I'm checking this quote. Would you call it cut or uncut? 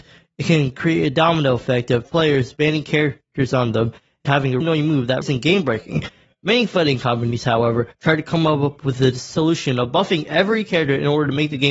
cut